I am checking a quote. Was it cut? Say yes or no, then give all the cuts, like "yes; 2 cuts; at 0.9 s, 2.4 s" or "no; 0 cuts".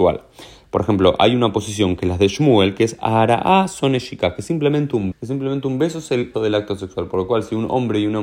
yes; 2 cuts; at 5.1 s, 6.3 s